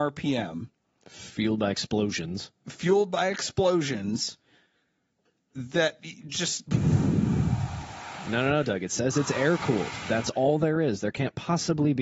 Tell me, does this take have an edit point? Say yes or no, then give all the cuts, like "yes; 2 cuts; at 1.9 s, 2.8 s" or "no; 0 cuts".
no; 0 cuts